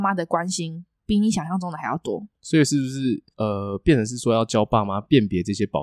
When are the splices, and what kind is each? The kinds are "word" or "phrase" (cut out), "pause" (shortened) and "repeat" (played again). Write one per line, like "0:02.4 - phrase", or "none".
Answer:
0:00.9 - pause
0:02.3 - pause
0:03.3 - pause